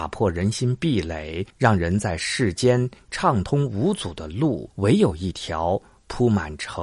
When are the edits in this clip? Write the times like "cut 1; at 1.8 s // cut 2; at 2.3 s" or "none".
cut 1; at 1.5 s // cut 2; at 4.7 s